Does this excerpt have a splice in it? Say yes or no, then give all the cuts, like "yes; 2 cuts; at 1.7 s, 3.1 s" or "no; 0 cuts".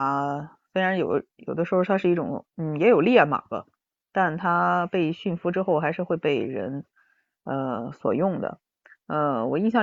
yes; 1 cut; at 2.5 s